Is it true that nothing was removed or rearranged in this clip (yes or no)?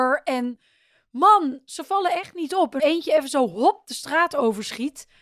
no